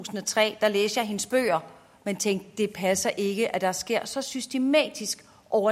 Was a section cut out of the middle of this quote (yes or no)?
no